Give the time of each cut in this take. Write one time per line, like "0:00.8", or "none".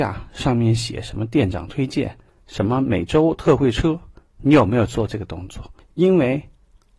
0:02.3
0:05.8